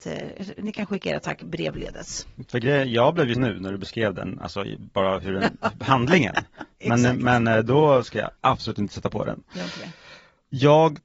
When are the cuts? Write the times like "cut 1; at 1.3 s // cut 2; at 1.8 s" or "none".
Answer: cut 1; at 3.3 s // cut 2; at 8.4 s